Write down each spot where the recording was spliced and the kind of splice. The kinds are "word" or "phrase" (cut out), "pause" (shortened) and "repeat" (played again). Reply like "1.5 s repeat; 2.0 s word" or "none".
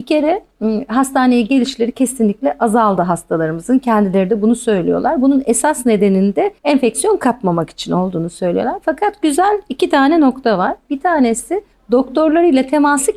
6.6 s pause; 11.7 s pause